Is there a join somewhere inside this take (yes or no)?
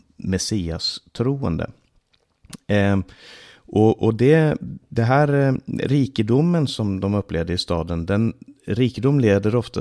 no